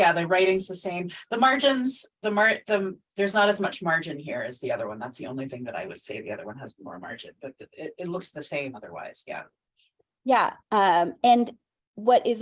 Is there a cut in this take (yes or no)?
yes